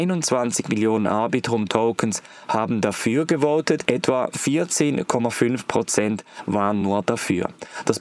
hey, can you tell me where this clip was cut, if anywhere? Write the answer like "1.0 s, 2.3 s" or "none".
none